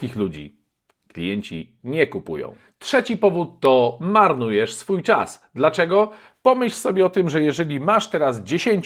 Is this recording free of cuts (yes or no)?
yes